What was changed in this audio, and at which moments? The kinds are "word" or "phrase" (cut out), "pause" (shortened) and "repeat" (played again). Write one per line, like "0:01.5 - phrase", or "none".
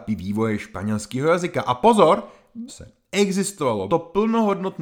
0:02.7 - word
0:03.9 - word